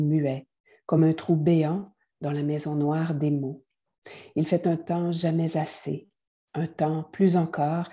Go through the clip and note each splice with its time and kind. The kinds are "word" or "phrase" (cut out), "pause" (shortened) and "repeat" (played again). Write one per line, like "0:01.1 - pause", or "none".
none